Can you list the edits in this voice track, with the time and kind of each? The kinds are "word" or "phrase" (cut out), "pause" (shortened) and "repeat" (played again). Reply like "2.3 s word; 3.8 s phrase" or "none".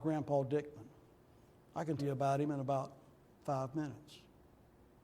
2.0 s word